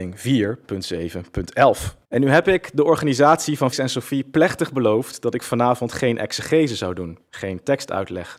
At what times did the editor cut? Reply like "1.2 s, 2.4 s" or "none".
2.0 s, 3.7 s